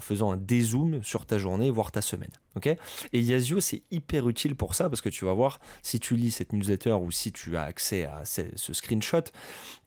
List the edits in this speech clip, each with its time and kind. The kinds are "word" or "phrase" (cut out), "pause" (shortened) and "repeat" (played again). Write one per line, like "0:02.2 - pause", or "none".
0:02.4 - pause